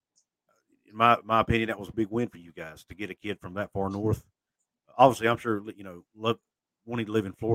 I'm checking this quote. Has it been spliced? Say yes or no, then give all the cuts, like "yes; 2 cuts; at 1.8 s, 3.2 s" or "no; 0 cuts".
yes; 1 cut; at 1.9 s